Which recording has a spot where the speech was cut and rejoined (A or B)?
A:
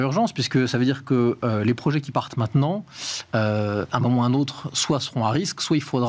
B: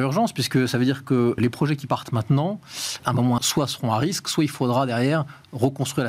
B